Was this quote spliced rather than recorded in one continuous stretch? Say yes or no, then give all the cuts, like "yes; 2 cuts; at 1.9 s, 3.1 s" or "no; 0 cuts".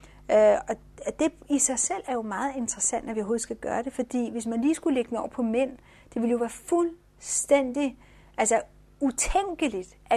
no; 0 cuts